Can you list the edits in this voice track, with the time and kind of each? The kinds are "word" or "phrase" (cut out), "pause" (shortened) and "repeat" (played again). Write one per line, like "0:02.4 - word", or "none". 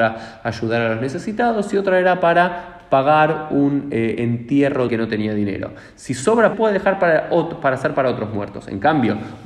0:04.9 - phrase
0:06.5 - phrase

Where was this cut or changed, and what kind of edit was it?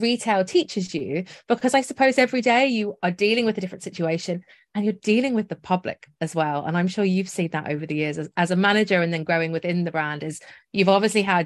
none

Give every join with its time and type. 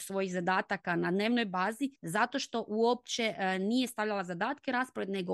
0:02.0 - pause

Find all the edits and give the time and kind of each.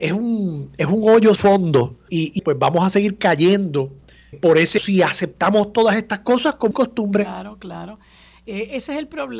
0:01.4 - word
0:02.1 - word
0:02.4 - word
0:04.3 - word
0:04.8 - word
0:06.7 - word

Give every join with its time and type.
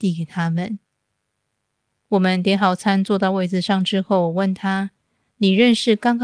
none

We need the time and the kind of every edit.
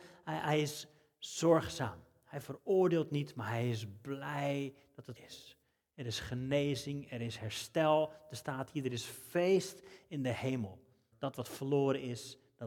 0:05.2 - word
0:11.1 - word

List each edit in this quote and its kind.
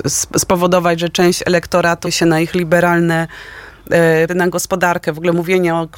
0:02.0 - word
0:04.3 - word

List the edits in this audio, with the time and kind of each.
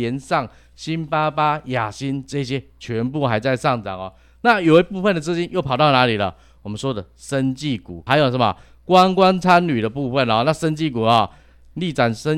none

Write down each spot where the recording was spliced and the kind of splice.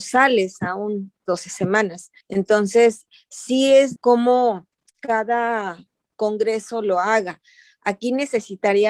0:01.3 - phrase
0:02.2 - pause
0:04.0 - phrase
0:04.9 - pause

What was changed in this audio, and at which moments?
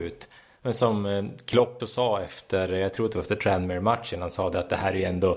0:01.8 - word

